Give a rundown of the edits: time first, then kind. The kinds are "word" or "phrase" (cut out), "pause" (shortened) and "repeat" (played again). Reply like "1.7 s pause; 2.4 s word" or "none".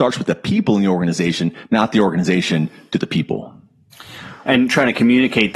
none